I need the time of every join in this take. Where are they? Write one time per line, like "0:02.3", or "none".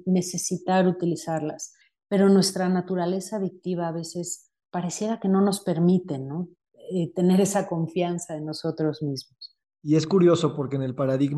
0:04.6